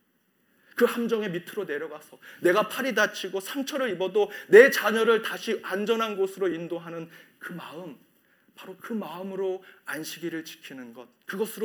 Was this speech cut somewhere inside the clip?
no; 0 cuts

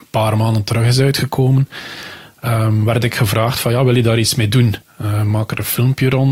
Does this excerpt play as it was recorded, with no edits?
no; 1 cut; at 4.8 s

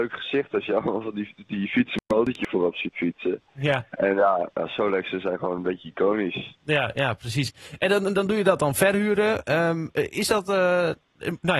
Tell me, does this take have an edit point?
yes; 2 cuts; at 2.1 s, 3.9 s

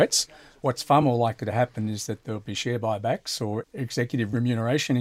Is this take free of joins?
yes; 0 cuts

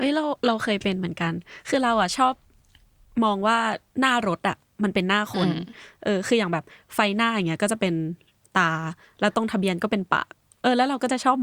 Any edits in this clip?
no; 0 cuts

